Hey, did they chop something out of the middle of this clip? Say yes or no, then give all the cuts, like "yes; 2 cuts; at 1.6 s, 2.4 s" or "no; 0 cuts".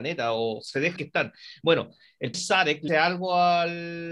yes; 3 cuts; at 1.0 s, 2.3 s, 2.9 s